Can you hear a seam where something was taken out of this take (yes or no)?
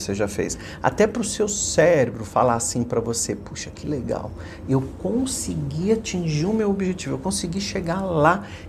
no